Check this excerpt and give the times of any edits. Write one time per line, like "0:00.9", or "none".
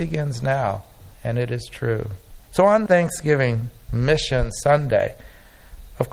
0:01.1
0:02.4
0:02.9

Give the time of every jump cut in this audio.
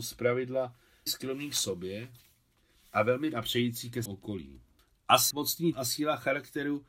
0:01.1
0:03.3
0:04.1
0:05.3
0:05.7

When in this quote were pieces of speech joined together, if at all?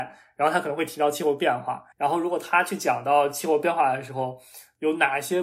0:01.9

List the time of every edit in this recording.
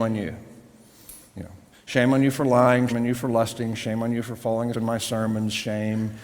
0:01.7
0:02.9
0:04.7

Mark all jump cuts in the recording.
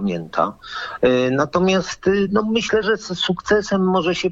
none

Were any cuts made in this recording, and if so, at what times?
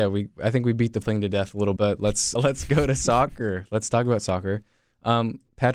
0:01.0
0:01.8
0:02.4

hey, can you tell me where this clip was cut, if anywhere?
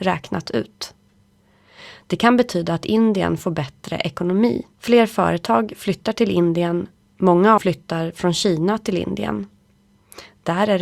0:04.7
0:07.6

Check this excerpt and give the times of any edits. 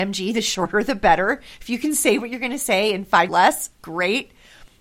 0:03.3
0:03.7

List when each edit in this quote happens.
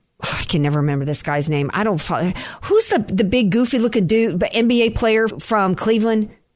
0:05.3

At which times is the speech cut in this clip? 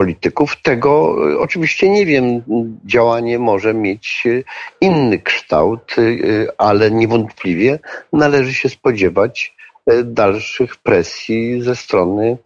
none

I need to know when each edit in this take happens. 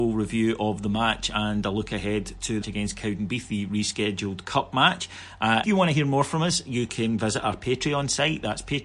0:02.6
0:05.6

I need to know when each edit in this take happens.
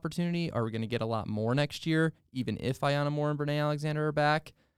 none

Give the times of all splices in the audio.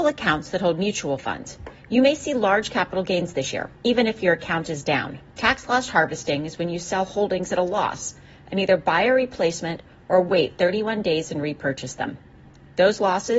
0:03.8
0:05.3

